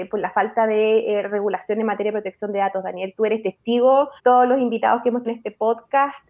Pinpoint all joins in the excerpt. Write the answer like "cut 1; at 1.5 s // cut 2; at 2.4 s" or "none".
cut 1; at 4.2 s // cut 2; at 5.2 s